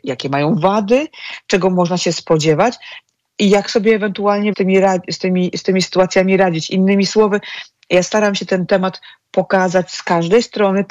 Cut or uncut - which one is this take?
cut